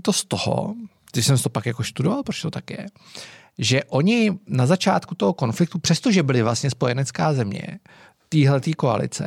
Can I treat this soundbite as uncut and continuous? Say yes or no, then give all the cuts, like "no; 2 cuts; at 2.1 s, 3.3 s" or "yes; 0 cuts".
yes; 0 cuts